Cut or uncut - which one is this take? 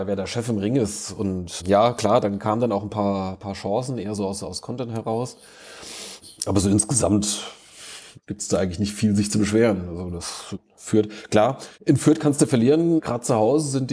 cut